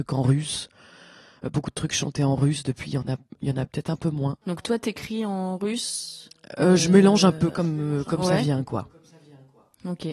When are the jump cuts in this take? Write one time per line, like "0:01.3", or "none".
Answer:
0:04.4